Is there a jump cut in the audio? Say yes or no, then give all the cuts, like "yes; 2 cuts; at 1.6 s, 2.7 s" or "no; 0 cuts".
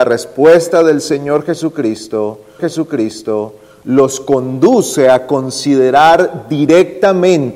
yes; 1 cut; at 2.6 s